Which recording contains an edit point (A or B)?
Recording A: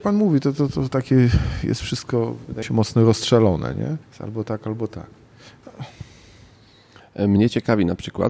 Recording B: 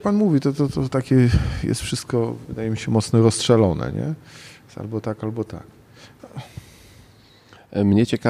A